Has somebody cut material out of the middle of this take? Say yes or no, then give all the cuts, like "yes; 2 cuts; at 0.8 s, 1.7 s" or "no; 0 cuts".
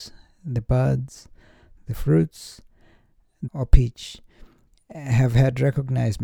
yes; 2 cuts; at 1.8 s, 3.5 s